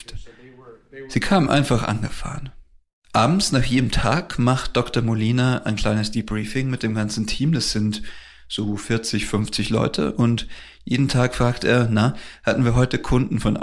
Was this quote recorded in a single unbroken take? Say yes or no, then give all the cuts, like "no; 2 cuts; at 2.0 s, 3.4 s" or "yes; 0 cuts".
yes; 0 cuts